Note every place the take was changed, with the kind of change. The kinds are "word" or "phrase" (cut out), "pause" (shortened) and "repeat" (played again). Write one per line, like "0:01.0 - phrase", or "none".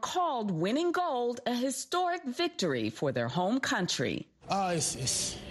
none